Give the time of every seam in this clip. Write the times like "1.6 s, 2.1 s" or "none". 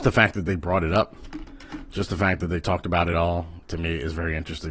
3.1 s